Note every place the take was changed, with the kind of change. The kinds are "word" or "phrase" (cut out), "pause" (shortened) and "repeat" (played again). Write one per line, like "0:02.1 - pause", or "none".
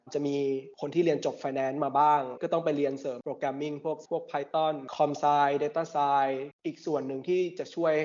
0:04.1 - word